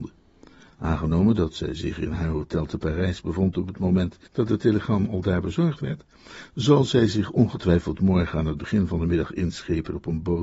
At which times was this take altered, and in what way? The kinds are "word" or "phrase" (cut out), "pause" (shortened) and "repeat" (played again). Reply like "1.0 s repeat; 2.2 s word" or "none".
4.3 s pause